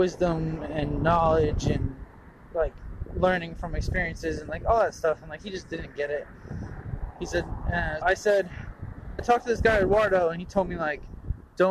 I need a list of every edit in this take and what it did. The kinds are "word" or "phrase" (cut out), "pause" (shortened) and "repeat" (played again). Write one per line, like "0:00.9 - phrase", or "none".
0:08.0 - word
0:09.2 - word